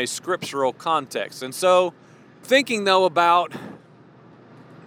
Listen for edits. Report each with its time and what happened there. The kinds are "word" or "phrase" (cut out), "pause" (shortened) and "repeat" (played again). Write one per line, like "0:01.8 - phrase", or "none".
0:02.4 - word